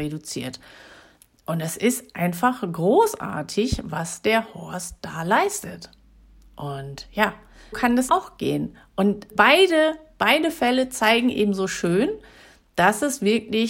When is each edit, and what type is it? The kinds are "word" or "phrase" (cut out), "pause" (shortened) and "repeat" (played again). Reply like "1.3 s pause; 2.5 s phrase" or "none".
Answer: 7.7 s word; 8.1 s word; 9.3 s word